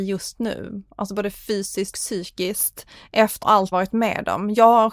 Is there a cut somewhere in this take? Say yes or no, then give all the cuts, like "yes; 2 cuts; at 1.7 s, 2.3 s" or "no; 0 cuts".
yes; 3 cuts; at 1.9 s, 3.4 s, 3.7 s